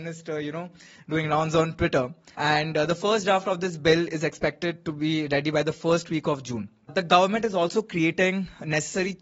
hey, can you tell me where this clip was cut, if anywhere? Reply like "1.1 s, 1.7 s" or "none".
2.3 s